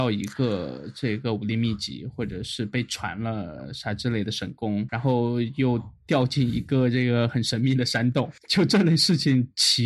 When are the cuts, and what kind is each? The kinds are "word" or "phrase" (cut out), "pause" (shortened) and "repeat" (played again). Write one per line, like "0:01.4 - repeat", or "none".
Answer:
0:04.9 - word
0:08.4 - pause